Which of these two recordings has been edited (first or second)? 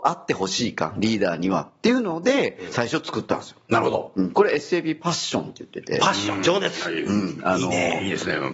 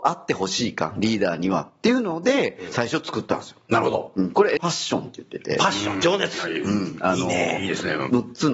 second